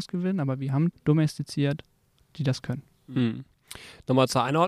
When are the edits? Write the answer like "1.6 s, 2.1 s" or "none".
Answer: 0.9 s